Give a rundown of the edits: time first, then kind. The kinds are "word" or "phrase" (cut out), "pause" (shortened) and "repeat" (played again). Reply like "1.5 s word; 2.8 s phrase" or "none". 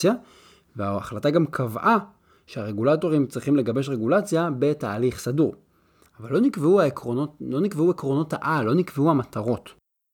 none